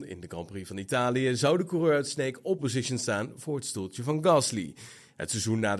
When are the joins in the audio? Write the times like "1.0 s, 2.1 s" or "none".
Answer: 2.6 s